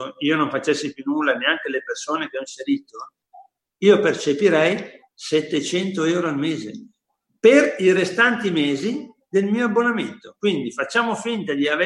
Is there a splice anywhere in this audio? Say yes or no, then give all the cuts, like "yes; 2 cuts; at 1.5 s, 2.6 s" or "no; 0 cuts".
no; 0 cuts